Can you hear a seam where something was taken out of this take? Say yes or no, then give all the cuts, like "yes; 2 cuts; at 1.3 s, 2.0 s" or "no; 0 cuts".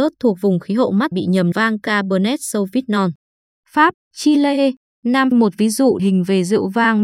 yes; 5 cuts; at 1.1 s, 1.5 s, 4.1 s, 5.3 s, 6.0 s